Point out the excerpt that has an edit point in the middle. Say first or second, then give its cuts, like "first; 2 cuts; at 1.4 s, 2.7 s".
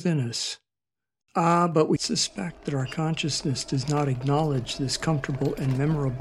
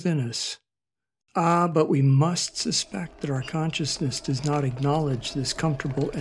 first; 1 cut; at 2.0 s